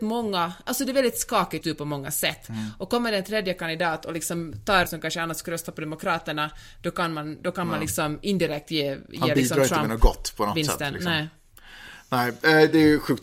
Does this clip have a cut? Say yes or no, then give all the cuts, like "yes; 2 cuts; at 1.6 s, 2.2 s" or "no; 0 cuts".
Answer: yes; 2 cuts; at 1.6 s, 4.9 s